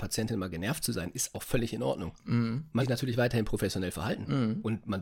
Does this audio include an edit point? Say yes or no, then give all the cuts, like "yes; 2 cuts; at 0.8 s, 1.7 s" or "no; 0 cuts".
yes; 2 cuts; at 1.3 s, 2.8 s